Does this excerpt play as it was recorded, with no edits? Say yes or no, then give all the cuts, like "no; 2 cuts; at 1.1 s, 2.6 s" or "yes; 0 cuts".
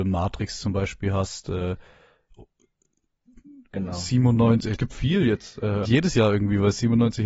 no; 2 cuts; at 4.8 s, 5.8 s